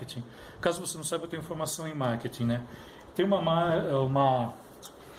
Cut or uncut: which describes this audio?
uncut